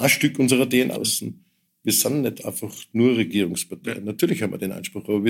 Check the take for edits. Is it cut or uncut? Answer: cut